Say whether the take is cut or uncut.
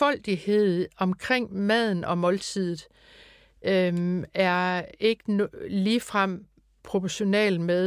uncut